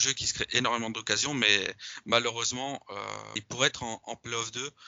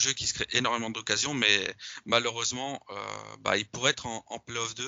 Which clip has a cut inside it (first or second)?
first